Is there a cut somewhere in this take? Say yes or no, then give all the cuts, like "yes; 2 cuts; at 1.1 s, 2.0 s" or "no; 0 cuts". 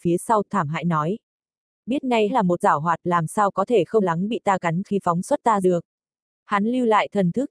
yes; 5 cuts; at 2.3 s, 2.6 s, 4.0 s, 4.8 s, 5.6 s